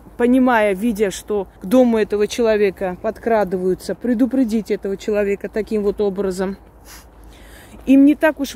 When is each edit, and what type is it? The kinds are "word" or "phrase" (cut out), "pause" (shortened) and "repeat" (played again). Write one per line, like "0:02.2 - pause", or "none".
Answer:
0:01.6 - pause